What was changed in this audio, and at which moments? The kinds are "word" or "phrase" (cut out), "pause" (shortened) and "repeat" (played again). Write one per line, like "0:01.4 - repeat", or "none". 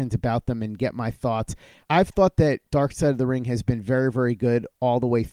none